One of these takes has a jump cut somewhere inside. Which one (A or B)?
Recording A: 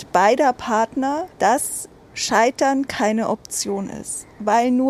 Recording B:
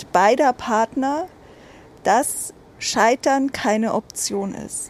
A